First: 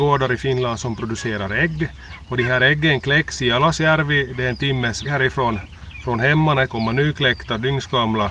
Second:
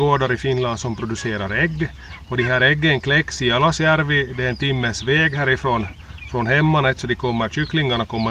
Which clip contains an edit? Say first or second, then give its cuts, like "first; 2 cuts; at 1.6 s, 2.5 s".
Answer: first; 2 cuts; at 5.0 s, 6.7 s